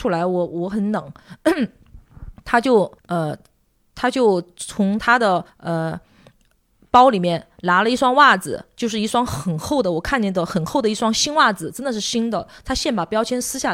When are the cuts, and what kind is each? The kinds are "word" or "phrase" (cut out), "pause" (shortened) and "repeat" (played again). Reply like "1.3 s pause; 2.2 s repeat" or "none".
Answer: 3.0 s pause; 5.5 s pause